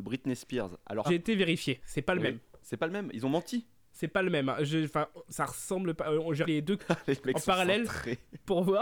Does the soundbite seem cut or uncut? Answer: cut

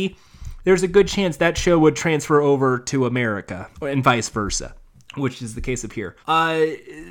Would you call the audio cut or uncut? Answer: cut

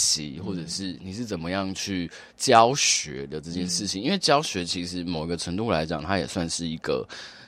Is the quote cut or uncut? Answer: cut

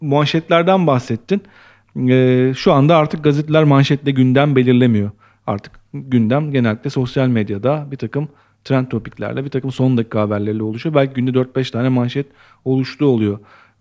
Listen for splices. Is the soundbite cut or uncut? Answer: uncut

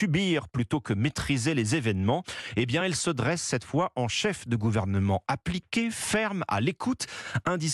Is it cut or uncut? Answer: uncut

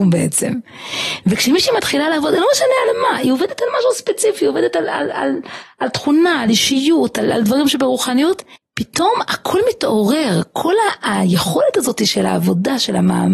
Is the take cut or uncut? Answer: cut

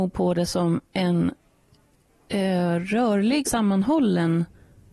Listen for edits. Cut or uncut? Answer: cut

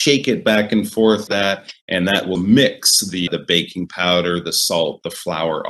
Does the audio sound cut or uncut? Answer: cut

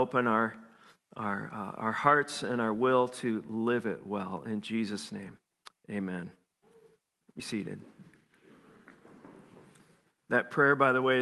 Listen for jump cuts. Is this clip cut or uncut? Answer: cut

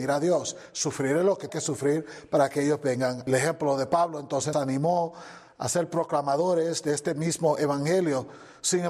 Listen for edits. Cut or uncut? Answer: cut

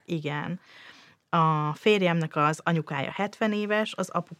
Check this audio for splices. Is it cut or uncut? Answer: uncut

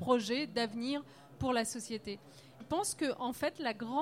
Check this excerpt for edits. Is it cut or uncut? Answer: cut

